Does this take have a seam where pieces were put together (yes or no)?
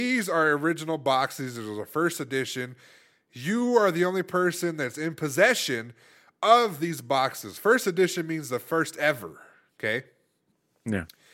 no